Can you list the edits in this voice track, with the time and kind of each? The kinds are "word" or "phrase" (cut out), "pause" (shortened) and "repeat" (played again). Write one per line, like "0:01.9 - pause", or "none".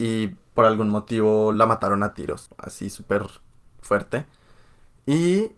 none